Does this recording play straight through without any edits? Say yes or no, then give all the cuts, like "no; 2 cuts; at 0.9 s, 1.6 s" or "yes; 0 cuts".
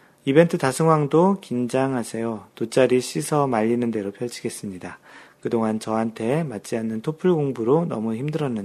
no; 1 cut; at 2.5 s